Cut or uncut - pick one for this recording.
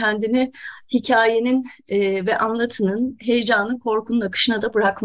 uncut